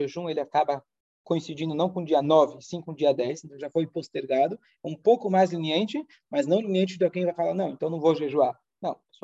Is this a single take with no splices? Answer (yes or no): yes